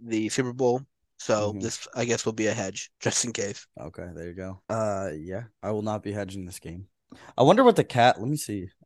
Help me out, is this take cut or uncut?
cut